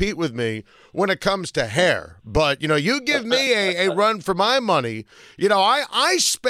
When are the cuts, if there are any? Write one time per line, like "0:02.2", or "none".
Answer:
none

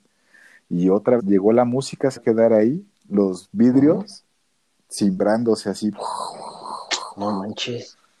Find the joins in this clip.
0:01.2
0:02.2
0:03.0

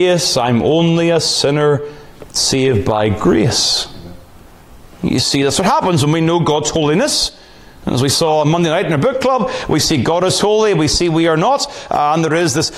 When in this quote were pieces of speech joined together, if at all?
none

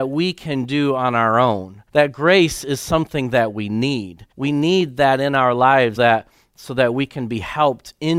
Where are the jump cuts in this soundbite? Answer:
0:01.9
0:04.3
0:06.0

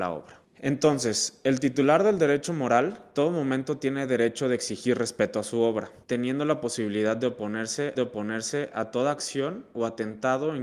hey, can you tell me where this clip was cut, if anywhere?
0:03.1
0:06.0
0:07.9

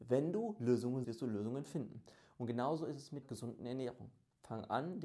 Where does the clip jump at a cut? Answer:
0:01.0
0:03.2

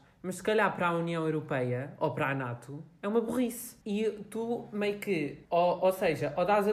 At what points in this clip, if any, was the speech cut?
0:03.8
0:05.4

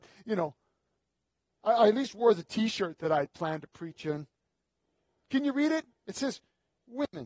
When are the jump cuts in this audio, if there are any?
none

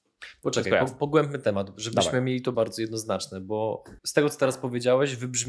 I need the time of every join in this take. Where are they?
0:02.5
0:04.0

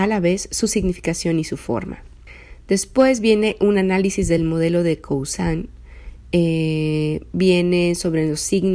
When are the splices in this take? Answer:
none

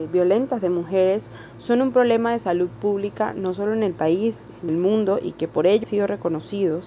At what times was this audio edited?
0:04.7
0:05.8

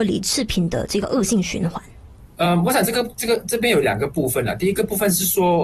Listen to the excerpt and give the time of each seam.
none

